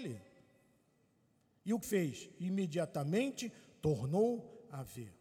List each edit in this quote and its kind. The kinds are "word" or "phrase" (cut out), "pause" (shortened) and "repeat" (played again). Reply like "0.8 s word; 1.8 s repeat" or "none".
1.8 s word